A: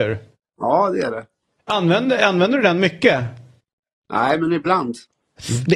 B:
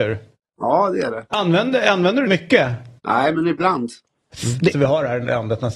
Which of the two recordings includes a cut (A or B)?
B